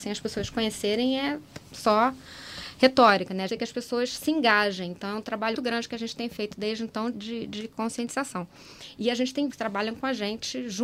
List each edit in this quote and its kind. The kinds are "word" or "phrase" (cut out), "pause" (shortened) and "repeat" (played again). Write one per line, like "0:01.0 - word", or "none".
0:03.5 - phrase
0:05.5 - word
0:07.1 - word
0:09.5 - phrase